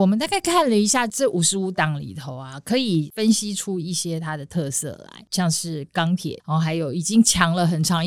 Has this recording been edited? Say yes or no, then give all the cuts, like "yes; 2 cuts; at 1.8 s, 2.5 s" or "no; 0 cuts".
yes; 1 cut; at 6.4 s